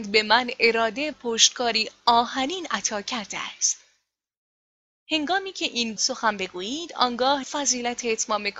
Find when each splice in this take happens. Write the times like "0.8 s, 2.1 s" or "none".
1.1 s, 4.7 s, 6.0 s, 7.4 s